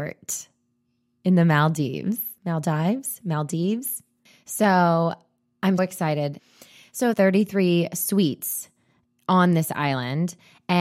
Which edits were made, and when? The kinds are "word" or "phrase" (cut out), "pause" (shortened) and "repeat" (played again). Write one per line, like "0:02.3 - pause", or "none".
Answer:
0:02.4 - pause
0:05.8 - word
0:07.1 - phrase